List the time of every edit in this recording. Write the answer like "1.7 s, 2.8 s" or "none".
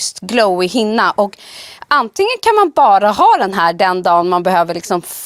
none